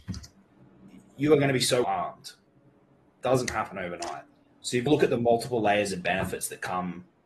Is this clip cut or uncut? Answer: cut